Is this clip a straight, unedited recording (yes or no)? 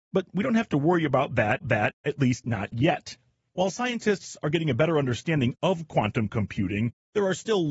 no